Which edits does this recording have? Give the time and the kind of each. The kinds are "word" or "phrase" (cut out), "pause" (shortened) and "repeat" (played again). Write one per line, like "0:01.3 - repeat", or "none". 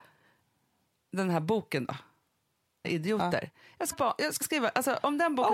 0:02.8 - word
0:03.9 - word
0:04.4 - word